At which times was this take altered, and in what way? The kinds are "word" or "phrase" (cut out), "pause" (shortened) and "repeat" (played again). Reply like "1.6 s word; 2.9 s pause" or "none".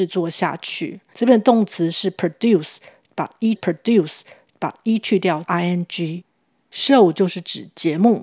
3.6 s repeat; 5.4 s phrase

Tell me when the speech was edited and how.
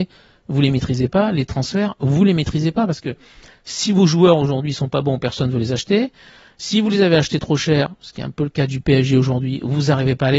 none

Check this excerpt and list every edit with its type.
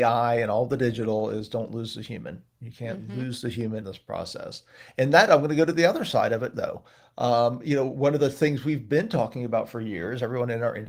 3.8 s word; 5.3 s word; 6.5 s word

